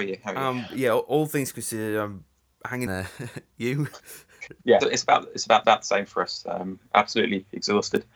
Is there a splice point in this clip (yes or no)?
yes